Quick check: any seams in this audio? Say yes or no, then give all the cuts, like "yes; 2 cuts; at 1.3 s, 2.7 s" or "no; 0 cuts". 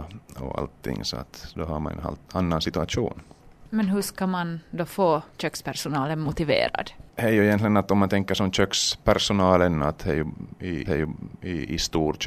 yes; 3 cuts; at 5.3 s, 7.1 s, 10.8 s